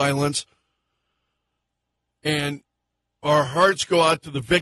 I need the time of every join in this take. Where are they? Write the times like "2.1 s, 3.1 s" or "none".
none